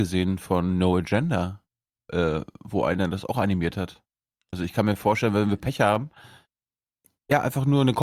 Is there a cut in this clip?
no; 0 cuts

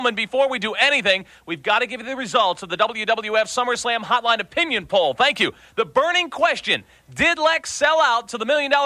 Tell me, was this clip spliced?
no; 0 cuts

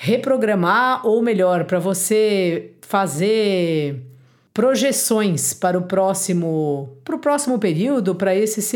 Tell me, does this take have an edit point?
no; 0 cuts

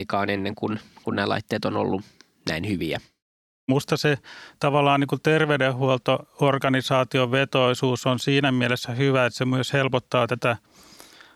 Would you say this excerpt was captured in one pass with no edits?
yes; 0 cuts

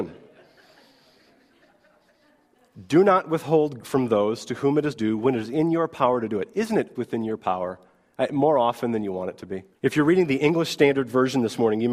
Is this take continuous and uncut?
no; 3 cuts; at 3.8 s, 6.9 s, 9.7 s

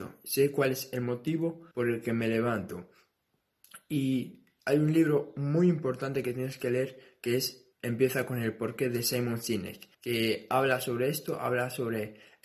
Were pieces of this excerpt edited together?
yes; 3 cuts; at 1.7 s, 7.7 s, 9.9 s

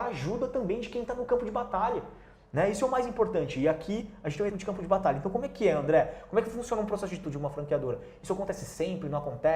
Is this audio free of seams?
no; 2 cuts; at 4.5 s, 7.2 s

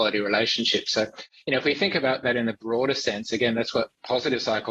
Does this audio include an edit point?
no; 0 cuts

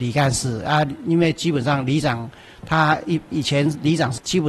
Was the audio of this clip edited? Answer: no; 0 cuts

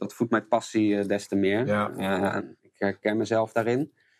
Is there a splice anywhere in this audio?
yes; 1 cut; at 2.6 s

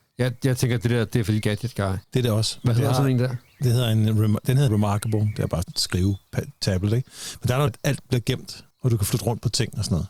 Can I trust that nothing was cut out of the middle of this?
no; 6 cuts; at 1.4 s, 2.0 s, 4.7 s, 5.6 s, 7.7 s, 8.7 s

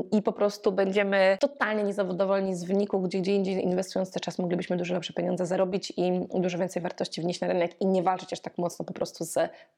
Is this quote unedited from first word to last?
yes; 0 cuts

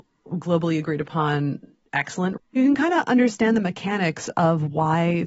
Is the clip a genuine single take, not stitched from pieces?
no; 1 cut; at 2.4 s

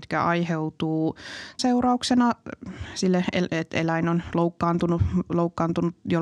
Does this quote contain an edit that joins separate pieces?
yes; 1 cut; at 1.6 s

